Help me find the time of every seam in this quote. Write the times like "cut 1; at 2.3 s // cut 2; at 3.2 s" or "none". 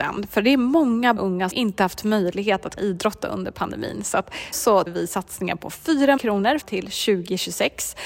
cut 1; at 1.2 s // cut 2; at 1.5 s // cut 3; at 2.8 s // cut 4; at 4.5 s // cut 5; at 4.9 s // cut 6; at 6.2 s // cut 7; at 6.6 s